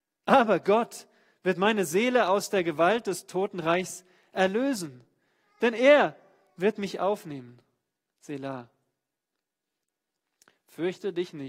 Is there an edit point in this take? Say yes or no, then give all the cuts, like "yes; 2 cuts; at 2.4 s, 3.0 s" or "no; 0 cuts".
no; 0 cuts